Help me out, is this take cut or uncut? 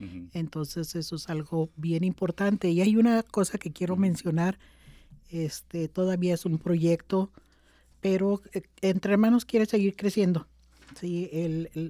uncut